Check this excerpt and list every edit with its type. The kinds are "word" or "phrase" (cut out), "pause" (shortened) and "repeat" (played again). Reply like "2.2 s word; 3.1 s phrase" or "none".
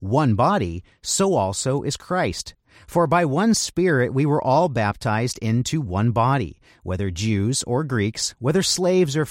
none